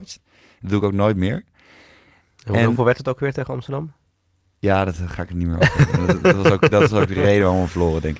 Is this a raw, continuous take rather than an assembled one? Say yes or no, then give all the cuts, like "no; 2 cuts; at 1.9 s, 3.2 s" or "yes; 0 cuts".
yes; 0 cuts